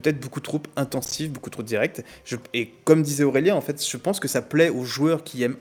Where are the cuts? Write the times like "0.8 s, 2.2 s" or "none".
none

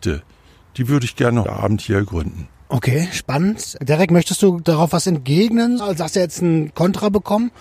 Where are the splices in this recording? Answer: 1.4 s, 5.8 s

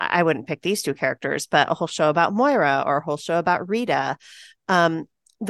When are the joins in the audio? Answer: none

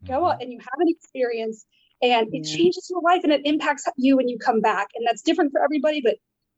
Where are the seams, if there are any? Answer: none

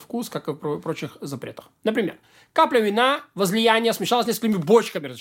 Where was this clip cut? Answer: none

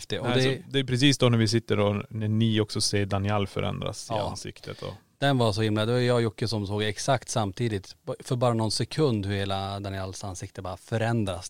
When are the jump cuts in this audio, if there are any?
none

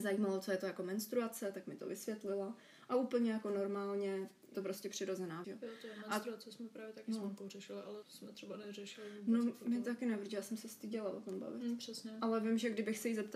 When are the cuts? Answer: 4.5 s, 5.4 s, 8.0 s

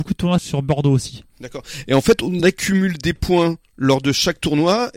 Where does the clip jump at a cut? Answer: none

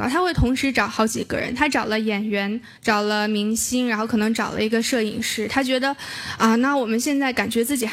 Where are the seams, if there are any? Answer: 2.8 s

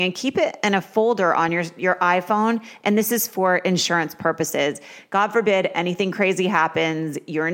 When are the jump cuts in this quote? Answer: none

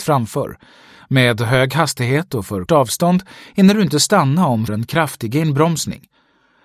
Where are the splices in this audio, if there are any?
2.7 s, 4.7 s

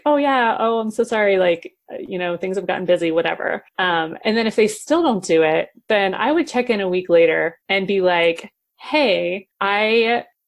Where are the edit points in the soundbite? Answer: 3.7 s, 7.6 s, 9.5 s

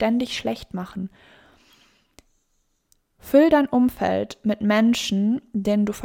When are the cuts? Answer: none

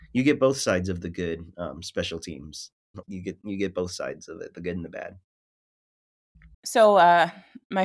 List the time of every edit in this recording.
3.0 s, 6.5 s

